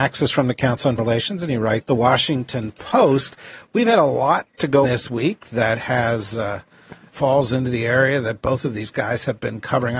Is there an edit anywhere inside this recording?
yes; 4 cuts; at 1.0 s, 1.8 s, 4.8 s, 7.1 s

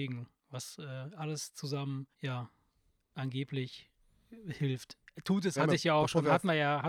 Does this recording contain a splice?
yes; 2 cuts; at 2.1 s, 5.6 s

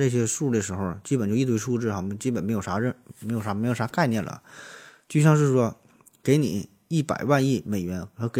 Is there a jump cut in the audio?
no; 0 cuts

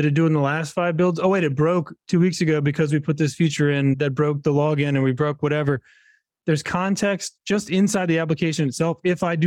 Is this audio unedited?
yes; 0 cuts

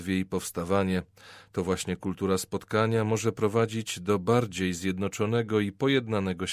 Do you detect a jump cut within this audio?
no; 0 cuts

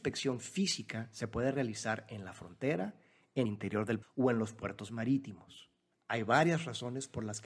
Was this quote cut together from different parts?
yes; 3 cuts; at 3.5 s, 4.0 s, 5.9 s

